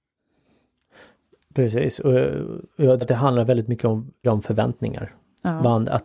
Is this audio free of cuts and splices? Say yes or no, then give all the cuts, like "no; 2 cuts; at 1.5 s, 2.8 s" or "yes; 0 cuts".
no; 3 cuts; at 2.7 s, 3.0 s, 4.2 s